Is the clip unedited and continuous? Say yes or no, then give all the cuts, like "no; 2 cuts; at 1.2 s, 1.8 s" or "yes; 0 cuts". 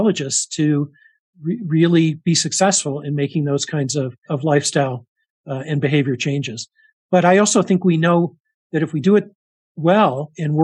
yes; 0 cuts